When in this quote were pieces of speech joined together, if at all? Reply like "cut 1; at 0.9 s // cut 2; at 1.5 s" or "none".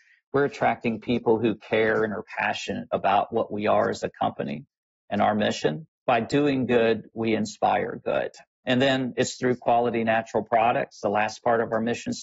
none